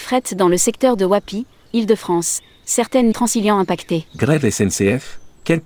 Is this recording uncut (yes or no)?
no